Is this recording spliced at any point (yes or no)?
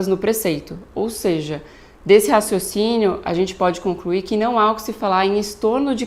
no